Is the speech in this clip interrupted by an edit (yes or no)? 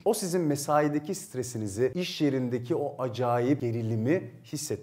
no